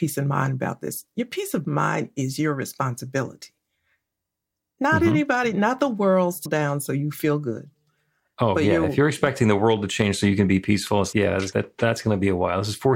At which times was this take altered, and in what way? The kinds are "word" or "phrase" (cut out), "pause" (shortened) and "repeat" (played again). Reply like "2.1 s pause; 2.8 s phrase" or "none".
6.5 s word; 11.1 s word; 11.5 s word